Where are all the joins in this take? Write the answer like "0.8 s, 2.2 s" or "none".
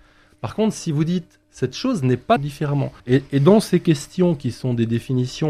1.4 s, 2.4 s, 3.0 s